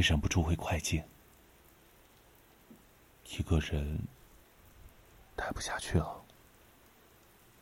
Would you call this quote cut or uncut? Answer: uncut